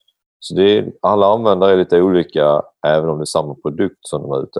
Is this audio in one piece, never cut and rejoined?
yes; 0 cuts

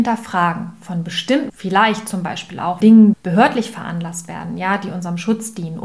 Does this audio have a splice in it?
yes; 3 cuts; at 1.5 s, 2.8 s, 3.1 s

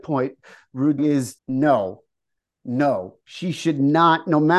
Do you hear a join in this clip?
yes; 3 cuts; at 1.0 s, 1.4 s, 3.2 s

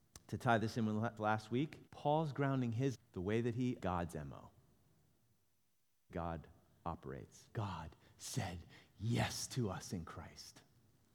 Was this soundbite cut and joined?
yes; 6 cuts; at 1.2 s, 1.9 s, 2.9 s, 3.8 s, 6.1 s, 7.5 s

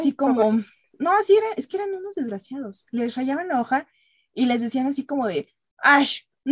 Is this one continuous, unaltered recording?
yes; 0 cuts

